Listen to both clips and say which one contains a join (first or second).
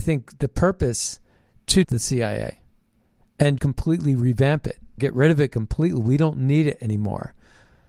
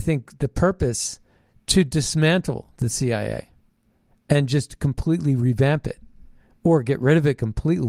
first